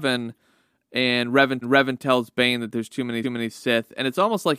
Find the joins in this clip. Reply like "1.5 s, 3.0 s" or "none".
1.6 s, 3.2 s